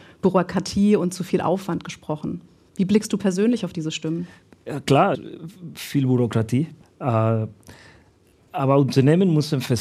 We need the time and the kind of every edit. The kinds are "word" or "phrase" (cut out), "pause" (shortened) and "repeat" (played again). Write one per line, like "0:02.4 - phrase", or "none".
0:05.1 - word
0:06.8 - pause